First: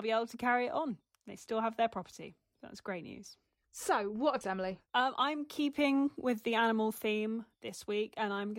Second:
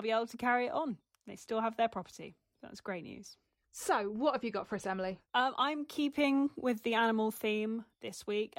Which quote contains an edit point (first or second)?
first